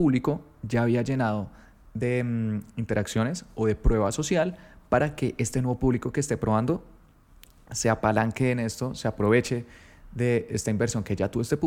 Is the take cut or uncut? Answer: uncut